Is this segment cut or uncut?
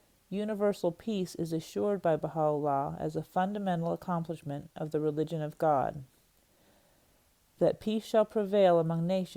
uncut